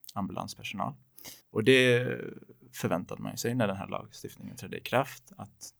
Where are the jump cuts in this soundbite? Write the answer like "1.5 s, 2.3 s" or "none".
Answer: 1.4 s

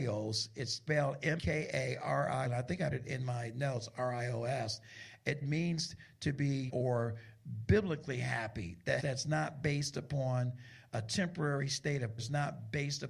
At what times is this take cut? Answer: 1.4 s, 2.4 s, 2.9 s, 5.4 s, 6.7 s, 9.0 s, 12.2 s

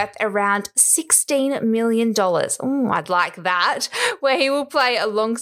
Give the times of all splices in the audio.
none

